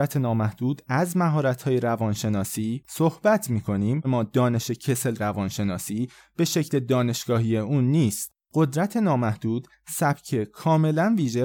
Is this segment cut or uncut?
cut